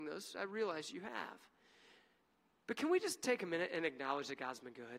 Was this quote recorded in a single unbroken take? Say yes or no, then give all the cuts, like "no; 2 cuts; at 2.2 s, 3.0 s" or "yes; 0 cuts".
yes; 0 cuts